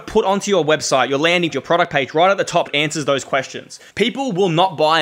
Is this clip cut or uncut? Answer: cut